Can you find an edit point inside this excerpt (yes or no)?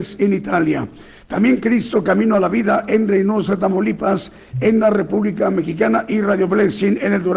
no